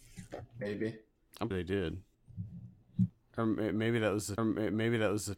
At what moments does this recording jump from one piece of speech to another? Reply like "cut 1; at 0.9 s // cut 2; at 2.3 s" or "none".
cut 1; at 1.5 s // cut 2; at 4.4 s